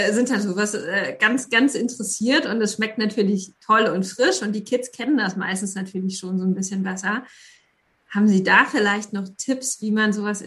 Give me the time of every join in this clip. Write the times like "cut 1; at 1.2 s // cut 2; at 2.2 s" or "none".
none